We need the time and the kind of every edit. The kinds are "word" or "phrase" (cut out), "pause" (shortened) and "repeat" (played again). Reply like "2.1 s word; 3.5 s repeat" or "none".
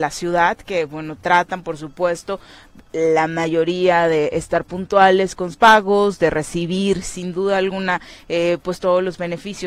5.5 s word